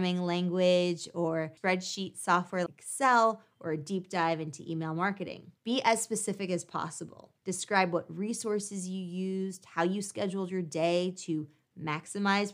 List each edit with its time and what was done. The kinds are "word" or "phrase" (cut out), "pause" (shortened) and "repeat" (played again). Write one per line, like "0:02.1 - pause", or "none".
0:02.7 - word
0:05.6 - pause
0:07.4 - pause